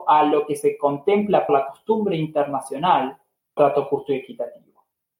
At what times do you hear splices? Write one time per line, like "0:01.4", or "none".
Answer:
0:01.5
0:03.6

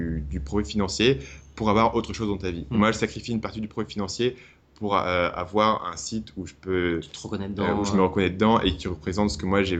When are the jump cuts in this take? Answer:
none

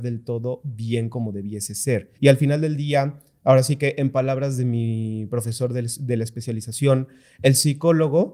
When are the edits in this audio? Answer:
0:02.2

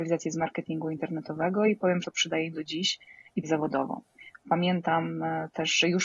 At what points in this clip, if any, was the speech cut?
0:02.0
0:02.5
0:03.4

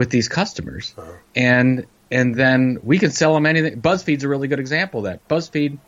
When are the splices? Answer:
none

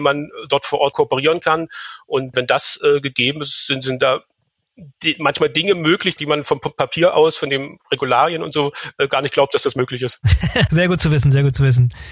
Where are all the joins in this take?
0:10.7

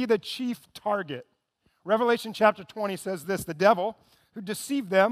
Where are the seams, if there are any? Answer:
none

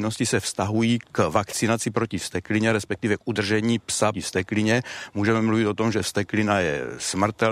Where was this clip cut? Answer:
0:04.1

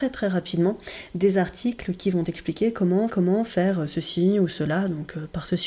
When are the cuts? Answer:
0:03.1

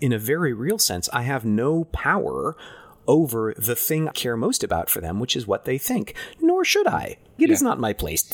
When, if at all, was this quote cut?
0:04.1
0:07.4

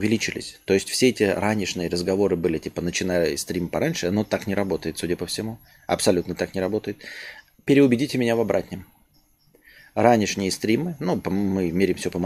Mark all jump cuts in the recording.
none

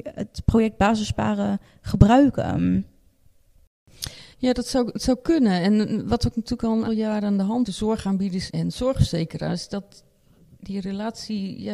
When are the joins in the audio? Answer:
0:04.3
0:06.9
0:07.7
0:08.5

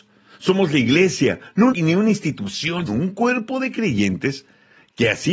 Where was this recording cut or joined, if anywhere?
0:01.7
0:02.9

